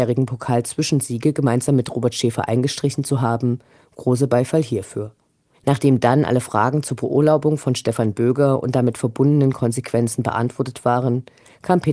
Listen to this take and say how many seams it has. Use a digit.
0